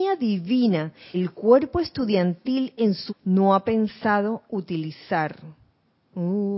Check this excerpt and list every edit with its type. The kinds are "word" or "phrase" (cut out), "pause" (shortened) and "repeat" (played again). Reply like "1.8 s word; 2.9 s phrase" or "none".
1.1 s word; 3.1 s word; 4.5 s word

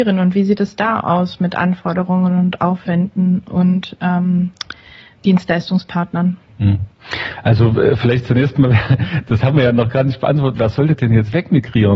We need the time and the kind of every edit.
none

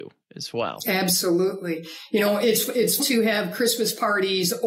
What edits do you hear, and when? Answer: 3.0 s word

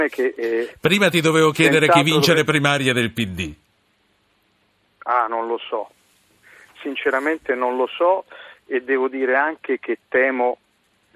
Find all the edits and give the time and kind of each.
none

